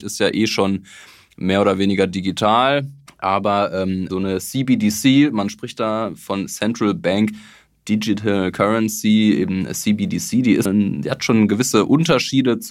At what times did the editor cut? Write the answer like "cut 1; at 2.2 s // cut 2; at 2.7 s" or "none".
cut 1; at 3.1 s // cut 2; at 4.1 s // cut 3; at 10.7 s